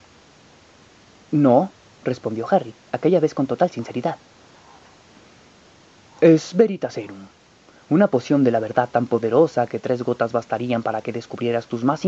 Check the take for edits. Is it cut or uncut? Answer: uncut